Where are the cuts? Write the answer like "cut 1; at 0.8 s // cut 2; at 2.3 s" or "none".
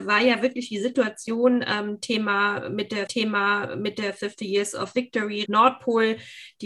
cut 1; at 3.1 s // cut 2; at 5.5 s